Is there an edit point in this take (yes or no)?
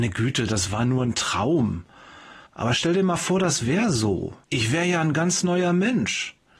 yes